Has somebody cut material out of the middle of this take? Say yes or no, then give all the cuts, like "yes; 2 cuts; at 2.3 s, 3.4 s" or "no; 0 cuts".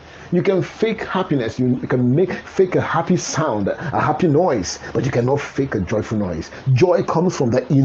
no; 0 cuts